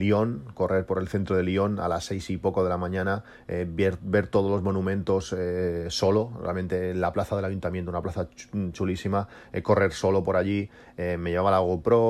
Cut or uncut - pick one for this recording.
uncut